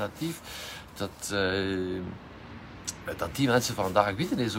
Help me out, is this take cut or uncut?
uncut